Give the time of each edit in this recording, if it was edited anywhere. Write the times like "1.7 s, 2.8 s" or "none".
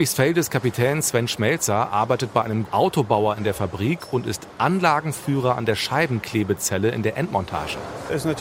2.6 s